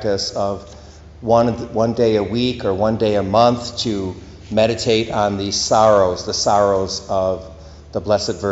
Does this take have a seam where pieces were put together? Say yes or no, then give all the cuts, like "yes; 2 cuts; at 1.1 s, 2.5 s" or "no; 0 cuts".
no; 0 cuts